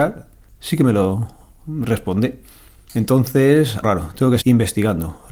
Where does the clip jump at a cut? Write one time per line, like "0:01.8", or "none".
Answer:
0:03.8
0:04.4